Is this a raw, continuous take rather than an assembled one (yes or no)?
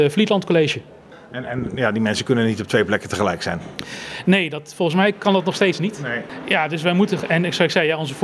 yes